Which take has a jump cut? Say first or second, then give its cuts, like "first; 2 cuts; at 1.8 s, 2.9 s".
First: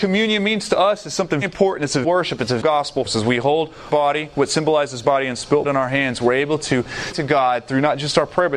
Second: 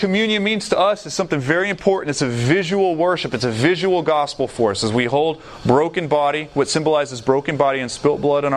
first; 8 cuts; at 1.4 s, 2.0 s, 2.6 s, 3.1 s, 3.9 s, 5.0 s, 5.6 s, 7.1 s